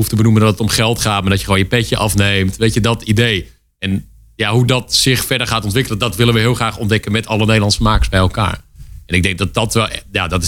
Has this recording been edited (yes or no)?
no